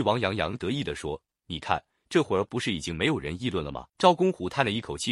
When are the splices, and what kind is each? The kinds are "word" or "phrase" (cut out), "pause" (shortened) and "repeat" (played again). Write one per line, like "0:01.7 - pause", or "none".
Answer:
0:03.9 - pause